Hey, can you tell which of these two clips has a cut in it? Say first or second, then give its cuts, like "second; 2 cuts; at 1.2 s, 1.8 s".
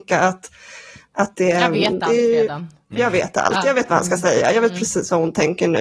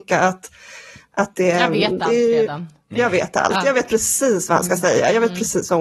first; 1 cut; at 3.9 s